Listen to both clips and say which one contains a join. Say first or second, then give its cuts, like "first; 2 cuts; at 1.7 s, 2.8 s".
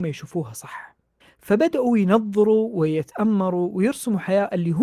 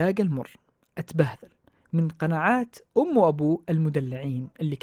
first; 1 cut; at 1.2 s